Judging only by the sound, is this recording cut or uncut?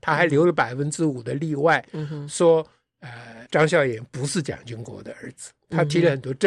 cut